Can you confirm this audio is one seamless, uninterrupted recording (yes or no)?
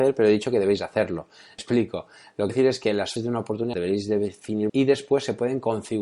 no